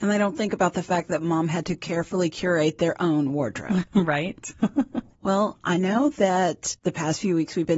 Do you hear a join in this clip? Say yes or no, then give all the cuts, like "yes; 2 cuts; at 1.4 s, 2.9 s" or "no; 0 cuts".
no; 0 cuts